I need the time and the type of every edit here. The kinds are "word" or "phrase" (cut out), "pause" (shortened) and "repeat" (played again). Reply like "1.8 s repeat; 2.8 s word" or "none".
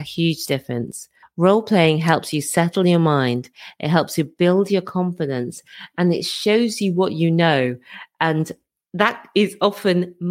1.2 s pause